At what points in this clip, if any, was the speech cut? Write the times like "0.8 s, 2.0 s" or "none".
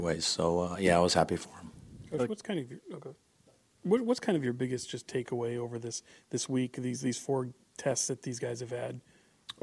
none